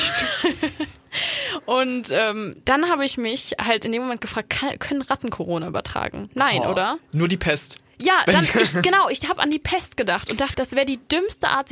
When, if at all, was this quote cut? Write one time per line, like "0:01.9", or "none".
0:10.5